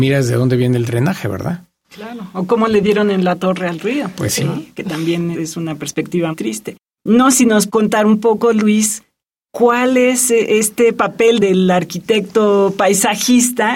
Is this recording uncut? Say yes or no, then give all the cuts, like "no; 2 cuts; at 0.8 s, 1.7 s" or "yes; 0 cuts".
no; 4 cuts; at 5.3 s, 6.3 s, 7.3 s, 7.7 s